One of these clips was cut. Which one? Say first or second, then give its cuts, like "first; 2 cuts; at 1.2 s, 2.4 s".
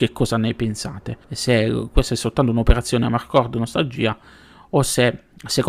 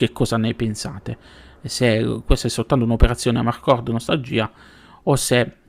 first; 1 cut; at 1.2 s